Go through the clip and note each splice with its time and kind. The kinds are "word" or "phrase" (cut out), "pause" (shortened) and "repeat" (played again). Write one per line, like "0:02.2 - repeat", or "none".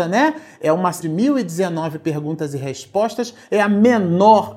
0:01.0 - phrase